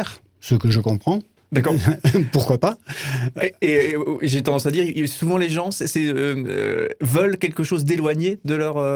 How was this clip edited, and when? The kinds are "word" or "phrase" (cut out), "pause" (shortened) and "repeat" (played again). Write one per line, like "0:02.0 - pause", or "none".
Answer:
0:01.4 - pause